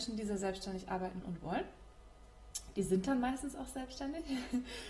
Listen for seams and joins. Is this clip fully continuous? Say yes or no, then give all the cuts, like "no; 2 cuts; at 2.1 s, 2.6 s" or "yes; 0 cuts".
no; 1 cut; at 1.2 s